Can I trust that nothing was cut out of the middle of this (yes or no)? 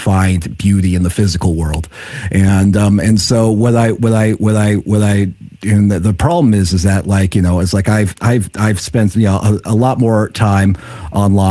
yes